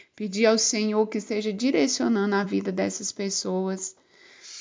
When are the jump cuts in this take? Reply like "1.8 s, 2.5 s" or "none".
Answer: none